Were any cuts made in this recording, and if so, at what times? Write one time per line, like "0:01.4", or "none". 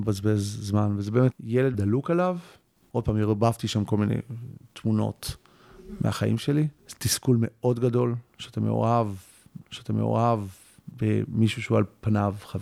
0:01.3
0:01.7
0:06.8
0:09.6